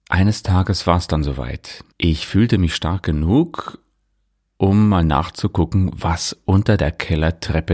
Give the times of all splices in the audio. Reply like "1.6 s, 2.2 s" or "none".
1.9 s